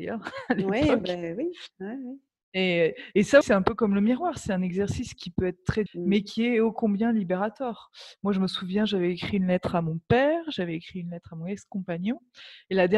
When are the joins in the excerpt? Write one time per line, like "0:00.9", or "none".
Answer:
0:03.4
0:05.9